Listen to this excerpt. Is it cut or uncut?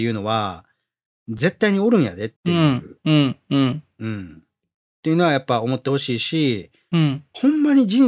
cut